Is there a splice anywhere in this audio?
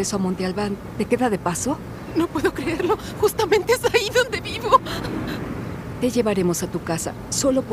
no; 0 cuts

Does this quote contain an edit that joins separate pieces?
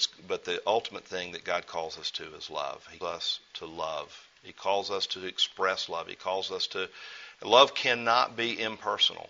yes; 1 cut; at 3.0 s

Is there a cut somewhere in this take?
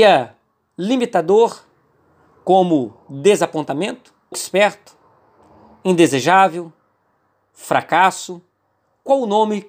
yes; 1 cut; at 4.3 s

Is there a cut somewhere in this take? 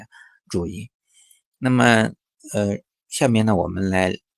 no; 0 cuts

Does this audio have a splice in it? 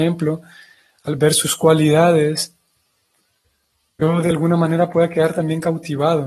no; 0 cuts

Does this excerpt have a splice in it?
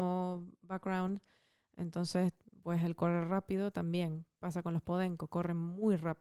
no; 0 cuts

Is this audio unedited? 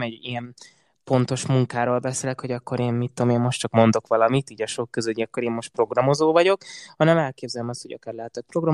yes; 0 cuts

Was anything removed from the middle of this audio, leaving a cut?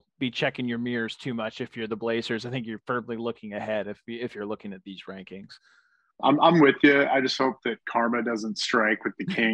no; 0 cuts

